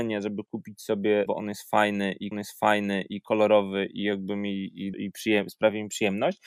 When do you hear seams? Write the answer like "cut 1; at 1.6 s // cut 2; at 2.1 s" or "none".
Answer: cut 1; at 1.3 s // cut 2; at 2.3 s // cut 3; at 4.9 s

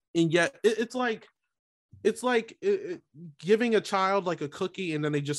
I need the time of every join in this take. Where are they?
none

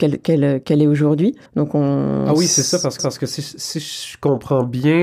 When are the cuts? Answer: cut 1; at 1.5 s // cut 2; at 3.0 s

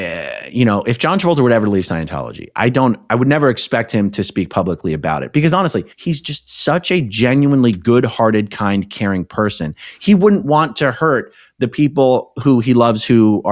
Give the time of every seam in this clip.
cut 1; at 5.9 s

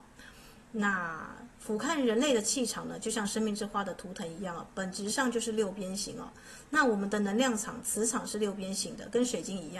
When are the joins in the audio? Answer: cut 1; at 1.5 s

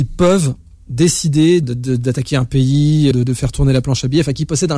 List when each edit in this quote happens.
cut 1; at 1.6 s // cut 2; at 3.1 s

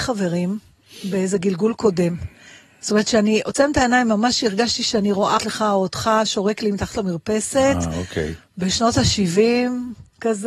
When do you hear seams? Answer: cut 1; at 5.4 s

